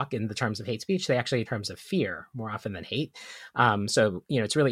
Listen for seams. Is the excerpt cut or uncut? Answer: cut